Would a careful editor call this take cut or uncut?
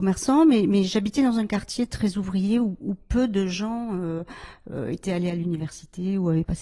uncut